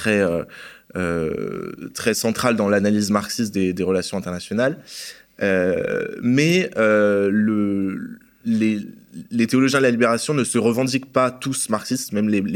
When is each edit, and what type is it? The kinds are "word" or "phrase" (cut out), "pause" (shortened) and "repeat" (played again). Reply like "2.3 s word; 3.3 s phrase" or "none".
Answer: none